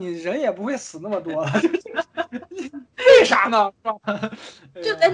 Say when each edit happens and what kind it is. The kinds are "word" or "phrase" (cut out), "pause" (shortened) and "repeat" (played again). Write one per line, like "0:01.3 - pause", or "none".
0:01.6 - phrase